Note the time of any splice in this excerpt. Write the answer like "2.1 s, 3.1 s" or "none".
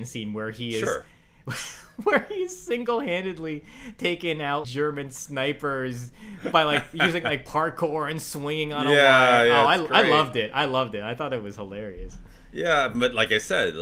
4.6 s